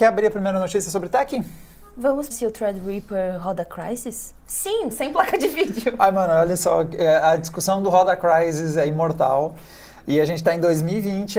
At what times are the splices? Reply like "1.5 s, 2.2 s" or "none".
2.3 s, 4.9 s